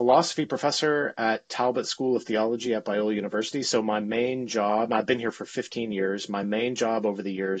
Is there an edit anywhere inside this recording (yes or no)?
no